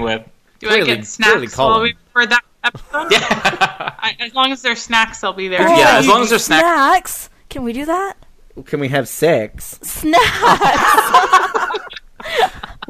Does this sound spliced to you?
no; 0 cuts

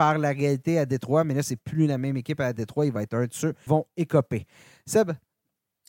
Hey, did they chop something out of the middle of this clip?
yes; 1 cut; at 3.7 s

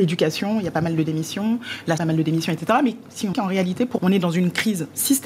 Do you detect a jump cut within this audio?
yes; 3 cuts; at 2.0 s, 3.3 s, 4.0 s

